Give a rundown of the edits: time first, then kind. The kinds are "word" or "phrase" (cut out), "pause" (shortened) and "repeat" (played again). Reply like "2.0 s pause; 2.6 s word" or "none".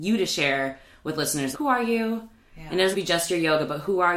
1.5 s word; 2.9 s word